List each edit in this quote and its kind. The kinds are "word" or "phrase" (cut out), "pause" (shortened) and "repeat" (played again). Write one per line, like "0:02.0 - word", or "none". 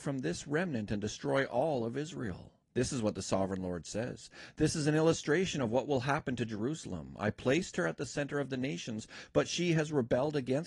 0:02.6 - pause